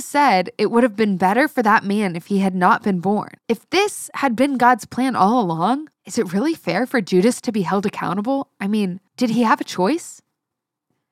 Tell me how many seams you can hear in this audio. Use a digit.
3